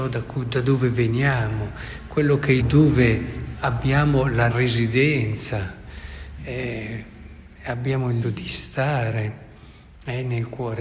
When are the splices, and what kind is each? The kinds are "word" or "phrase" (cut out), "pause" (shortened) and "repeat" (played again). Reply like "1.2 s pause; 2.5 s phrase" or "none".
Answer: 2.6 s word; 3.5 s word; 4.5 s word; 8.2 s word